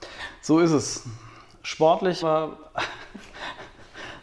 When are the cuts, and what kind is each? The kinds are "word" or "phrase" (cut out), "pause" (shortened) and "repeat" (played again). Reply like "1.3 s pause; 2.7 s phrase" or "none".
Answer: 2.2 s word